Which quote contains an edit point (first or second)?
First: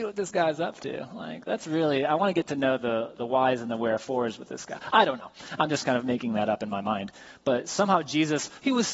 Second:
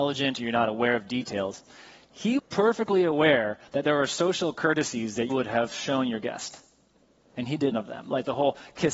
second